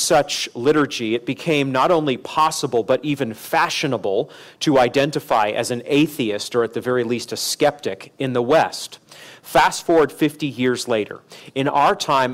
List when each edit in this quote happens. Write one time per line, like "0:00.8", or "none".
none